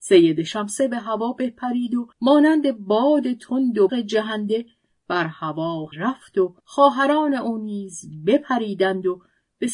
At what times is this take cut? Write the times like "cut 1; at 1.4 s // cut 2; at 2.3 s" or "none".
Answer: cut 1; at 2.1 s // cut 2; at 3.9 s // cut 3; at 5.9 s // cut 4; at 6.6 s